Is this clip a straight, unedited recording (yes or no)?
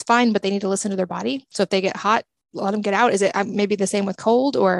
yes